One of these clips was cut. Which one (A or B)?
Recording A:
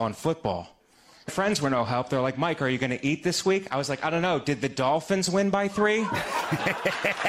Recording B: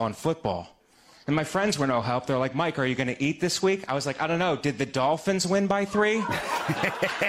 A